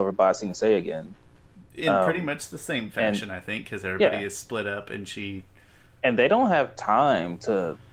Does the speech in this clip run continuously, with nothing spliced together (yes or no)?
yes